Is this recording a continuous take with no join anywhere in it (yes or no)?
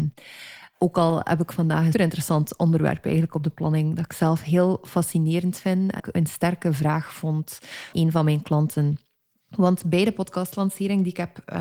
no